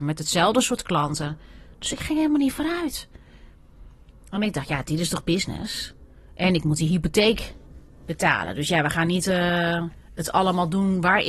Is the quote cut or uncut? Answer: uncut